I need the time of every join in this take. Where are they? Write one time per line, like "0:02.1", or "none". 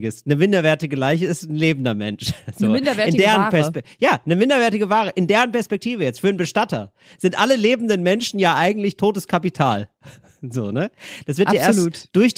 none